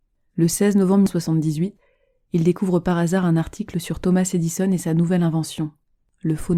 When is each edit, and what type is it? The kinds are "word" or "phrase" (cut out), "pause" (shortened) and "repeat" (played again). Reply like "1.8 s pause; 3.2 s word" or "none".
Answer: none